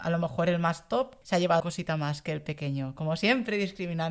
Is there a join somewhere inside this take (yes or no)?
yes